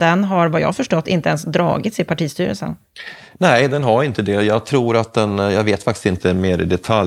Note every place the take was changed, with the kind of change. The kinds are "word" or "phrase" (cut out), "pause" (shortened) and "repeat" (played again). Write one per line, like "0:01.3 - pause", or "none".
none